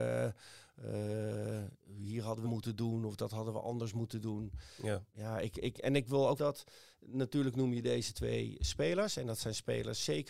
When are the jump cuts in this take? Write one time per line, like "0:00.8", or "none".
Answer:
0:01.8
0:02.4
0:05.1
0:06.4